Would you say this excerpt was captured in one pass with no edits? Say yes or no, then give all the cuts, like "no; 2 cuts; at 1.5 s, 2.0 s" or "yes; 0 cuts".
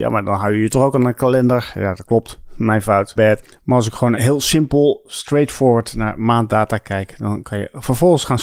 no; 2 cuts; at 3.2 s, 4.1 s